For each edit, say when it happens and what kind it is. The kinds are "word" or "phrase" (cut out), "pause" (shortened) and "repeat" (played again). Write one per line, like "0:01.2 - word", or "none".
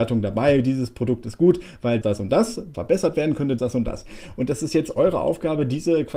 0:02.0 - word
0:02.7 - phrase
0:03.6 - word